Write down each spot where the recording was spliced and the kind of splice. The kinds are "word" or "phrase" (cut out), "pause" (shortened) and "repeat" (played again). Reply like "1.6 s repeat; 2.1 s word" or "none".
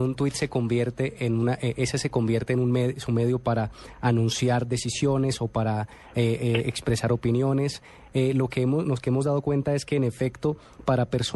none